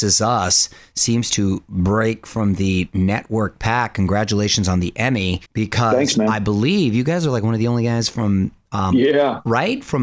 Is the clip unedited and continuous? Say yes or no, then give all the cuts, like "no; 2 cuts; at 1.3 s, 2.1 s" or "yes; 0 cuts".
no; 1 cut; at 5.5 s